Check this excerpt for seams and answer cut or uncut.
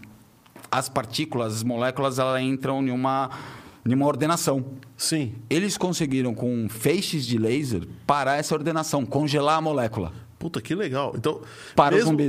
uncut